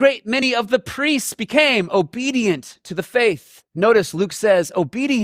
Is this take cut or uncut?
cut